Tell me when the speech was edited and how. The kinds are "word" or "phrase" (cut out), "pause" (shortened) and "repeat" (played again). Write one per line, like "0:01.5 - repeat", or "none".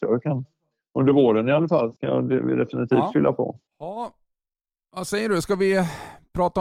0:02.0 - pause
0:03.7 - pause